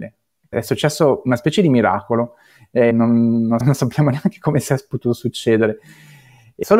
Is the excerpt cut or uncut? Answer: cut